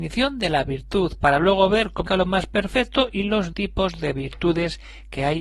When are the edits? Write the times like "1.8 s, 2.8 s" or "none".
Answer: 2.1 s, 3.5 s

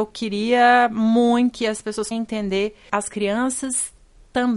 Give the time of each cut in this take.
1.5 s, 2.1 s, 2.9 s

